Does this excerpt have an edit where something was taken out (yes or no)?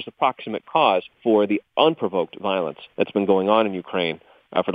yes